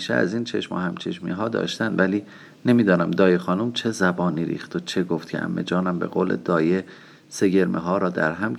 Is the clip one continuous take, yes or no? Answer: yes